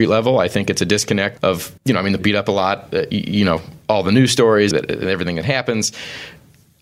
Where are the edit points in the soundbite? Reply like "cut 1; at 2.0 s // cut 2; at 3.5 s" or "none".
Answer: cut 1; at 1.4 s // cut 2; at 1.8 s // cut 3; at 2.2 s // cut 4; at 3.8 s // cut 5; at 4.7 s